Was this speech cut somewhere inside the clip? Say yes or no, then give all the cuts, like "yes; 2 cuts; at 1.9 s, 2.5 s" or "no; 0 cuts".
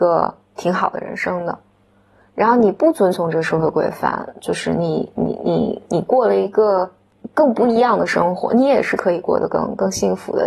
no; 0 cuts